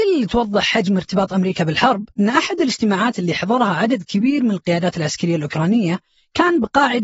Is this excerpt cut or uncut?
cut